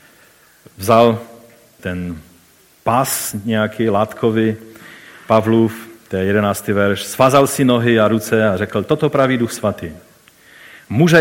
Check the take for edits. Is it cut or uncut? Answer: cut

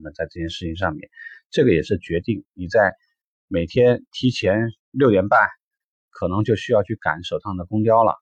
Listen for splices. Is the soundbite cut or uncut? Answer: cut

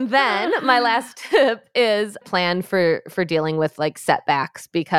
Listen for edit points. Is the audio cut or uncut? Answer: cut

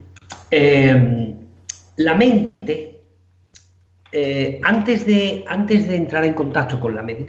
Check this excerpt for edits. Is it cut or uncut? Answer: uncut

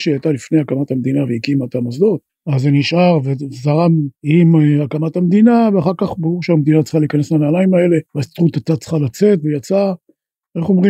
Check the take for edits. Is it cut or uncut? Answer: cut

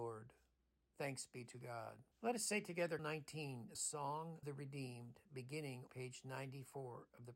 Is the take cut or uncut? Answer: cut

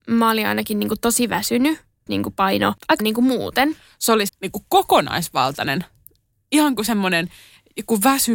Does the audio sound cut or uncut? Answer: cut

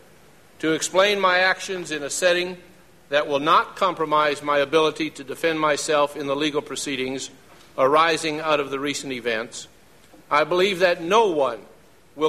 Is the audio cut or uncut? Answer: uncut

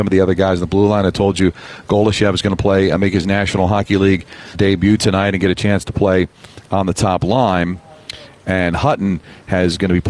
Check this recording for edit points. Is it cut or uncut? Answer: cut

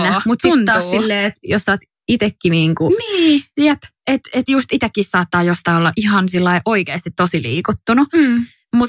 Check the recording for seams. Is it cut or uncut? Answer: uncut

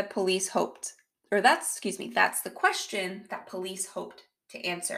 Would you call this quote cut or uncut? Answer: uncut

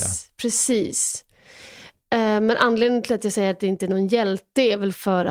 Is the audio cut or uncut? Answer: uncut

